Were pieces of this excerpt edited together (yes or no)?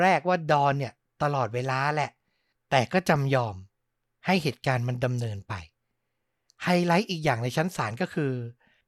no